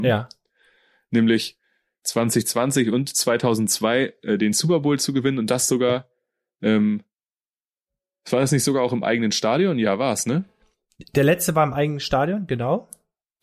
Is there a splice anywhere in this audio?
no; 0 cuts

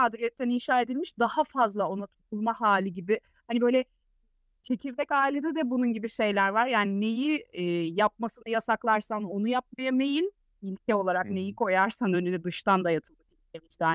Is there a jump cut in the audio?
no; 0 cuts

